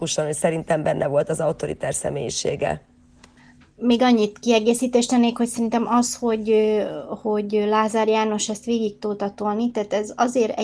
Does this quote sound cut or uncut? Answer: uncut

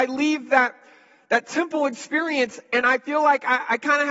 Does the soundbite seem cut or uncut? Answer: uncut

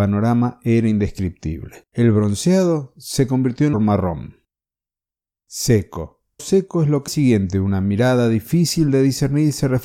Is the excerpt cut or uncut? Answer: cut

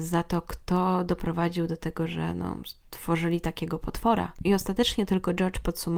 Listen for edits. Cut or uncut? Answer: uncut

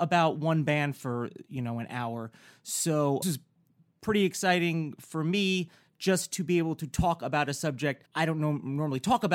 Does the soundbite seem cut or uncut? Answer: cut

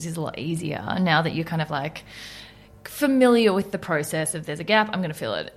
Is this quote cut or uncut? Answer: uncut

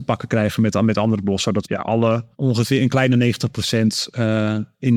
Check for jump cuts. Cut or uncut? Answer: cut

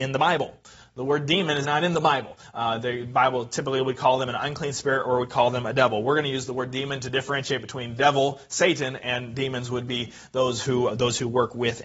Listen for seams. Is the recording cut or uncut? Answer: cut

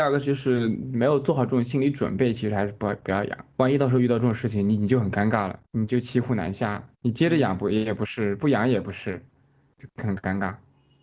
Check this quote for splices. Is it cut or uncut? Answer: cut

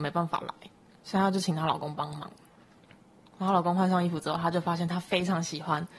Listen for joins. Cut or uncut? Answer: uncut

